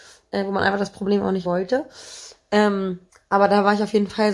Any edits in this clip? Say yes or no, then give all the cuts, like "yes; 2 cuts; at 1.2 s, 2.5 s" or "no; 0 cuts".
yes; 2 cuts; at 1.4 s, 3.1 s